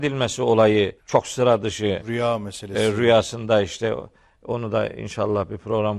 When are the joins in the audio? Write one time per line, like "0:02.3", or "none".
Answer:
0:01.0